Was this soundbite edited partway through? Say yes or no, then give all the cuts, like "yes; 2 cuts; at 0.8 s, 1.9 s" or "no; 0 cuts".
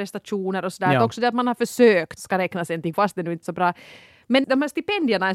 yes; 4 cuts; at 2.2 s, 2.9 s, 3.4 s, 4.4 s